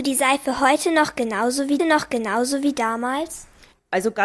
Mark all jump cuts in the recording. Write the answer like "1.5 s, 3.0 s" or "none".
1.8 s